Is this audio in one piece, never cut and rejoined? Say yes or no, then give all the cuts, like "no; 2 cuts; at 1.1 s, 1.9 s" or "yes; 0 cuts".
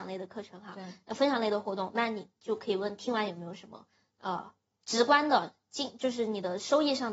yes; 0 cuts